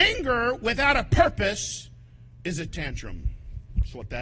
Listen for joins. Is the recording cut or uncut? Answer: cut